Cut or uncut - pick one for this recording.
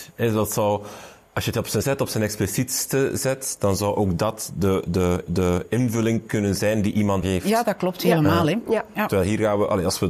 cut